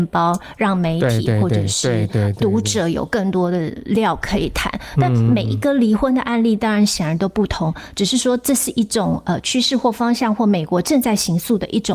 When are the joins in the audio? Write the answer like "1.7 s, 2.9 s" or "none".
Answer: none